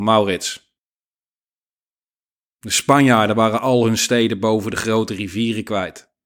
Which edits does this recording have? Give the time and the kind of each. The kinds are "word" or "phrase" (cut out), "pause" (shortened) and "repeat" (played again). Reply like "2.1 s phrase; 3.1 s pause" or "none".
none